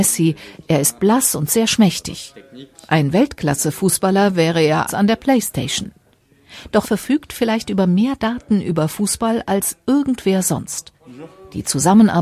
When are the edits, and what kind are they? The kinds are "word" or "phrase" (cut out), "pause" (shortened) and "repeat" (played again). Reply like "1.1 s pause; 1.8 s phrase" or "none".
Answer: 4.9 s word; 6.8 s word